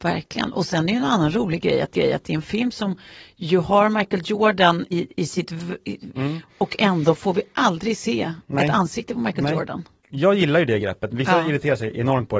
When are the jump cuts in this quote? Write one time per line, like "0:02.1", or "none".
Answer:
0:01.9
0:04.9
0:06.1